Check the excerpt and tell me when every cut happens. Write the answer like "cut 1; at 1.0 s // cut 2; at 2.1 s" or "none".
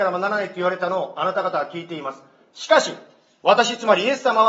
none